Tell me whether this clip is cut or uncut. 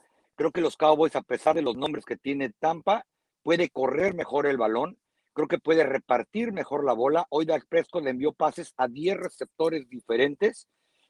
uncut